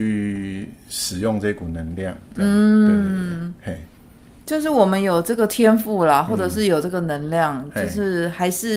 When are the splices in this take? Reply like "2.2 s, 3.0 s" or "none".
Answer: none